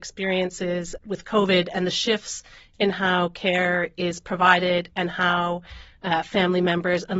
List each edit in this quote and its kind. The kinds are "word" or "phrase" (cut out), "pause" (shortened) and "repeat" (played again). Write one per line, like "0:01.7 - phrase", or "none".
0:01.0 - word